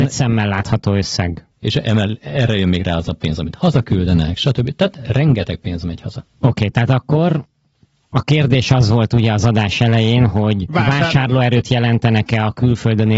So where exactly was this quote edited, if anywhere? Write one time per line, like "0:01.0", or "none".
0:01.5